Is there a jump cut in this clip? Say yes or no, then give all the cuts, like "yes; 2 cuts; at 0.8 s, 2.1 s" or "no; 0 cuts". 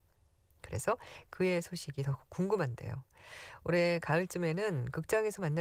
no; 0 cuts